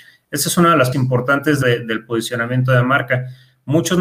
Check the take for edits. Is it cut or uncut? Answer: cut